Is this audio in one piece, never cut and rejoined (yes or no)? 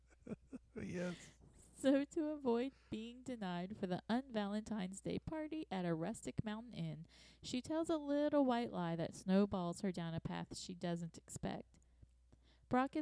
yes